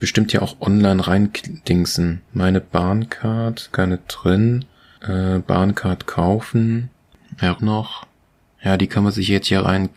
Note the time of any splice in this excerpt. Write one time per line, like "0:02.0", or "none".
0:02.3
0:03.7
0:07.6